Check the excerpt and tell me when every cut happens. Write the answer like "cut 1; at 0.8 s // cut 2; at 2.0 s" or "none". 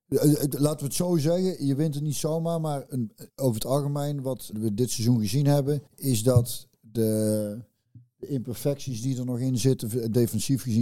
cut 1; at 2.9 s // cut 2; at 3.3 s // cut 3; at 4.5 s // cut 4; at 5.9 s